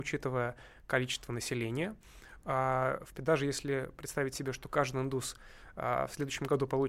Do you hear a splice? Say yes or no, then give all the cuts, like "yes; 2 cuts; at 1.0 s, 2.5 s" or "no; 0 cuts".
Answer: yes; 1 cut; at 3.1 s